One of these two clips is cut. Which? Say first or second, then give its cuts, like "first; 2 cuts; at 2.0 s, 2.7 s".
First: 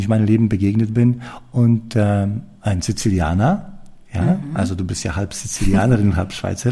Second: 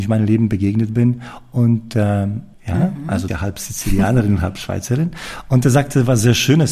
second; 2 cuts; at 2.5 s, 3.3 s